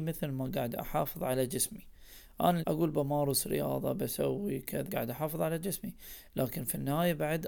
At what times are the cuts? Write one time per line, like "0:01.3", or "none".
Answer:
0:02.6
0:04.9